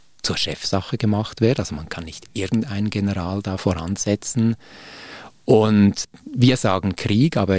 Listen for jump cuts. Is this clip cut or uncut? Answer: uncut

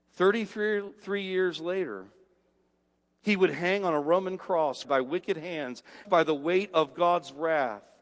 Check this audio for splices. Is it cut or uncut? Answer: cut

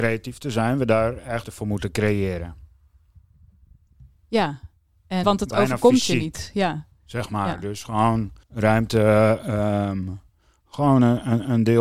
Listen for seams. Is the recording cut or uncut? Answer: cut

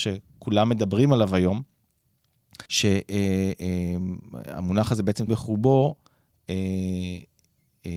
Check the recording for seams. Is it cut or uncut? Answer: cut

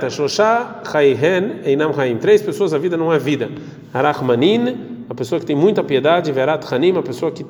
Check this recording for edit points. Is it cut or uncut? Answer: uncut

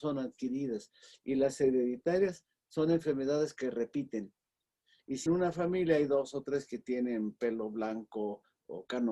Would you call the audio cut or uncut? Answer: cut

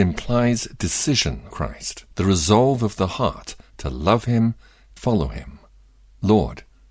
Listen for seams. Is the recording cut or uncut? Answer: cut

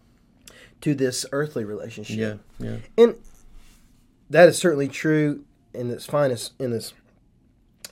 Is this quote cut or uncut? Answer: uncut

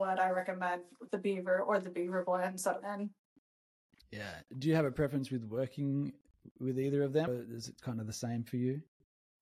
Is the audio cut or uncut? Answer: cut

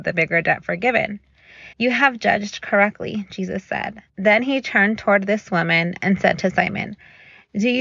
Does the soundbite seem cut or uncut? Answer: cut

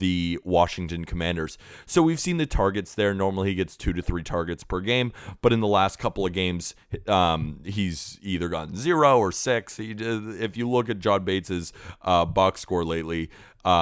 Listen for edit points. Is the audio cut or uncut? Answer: uncut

